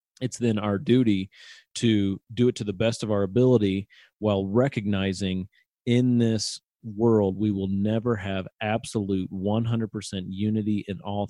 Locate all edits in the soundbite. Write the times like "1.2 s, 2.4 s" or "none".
none